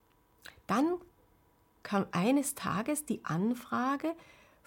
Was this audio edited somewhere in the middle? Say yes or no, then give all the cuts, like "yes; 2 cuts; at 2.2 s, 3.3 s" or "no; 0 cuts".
no; 0 cuts